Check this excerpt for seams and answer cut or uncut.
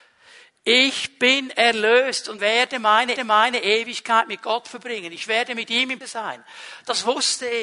cut